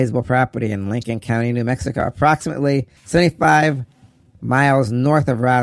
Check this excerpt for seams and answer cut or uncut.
cut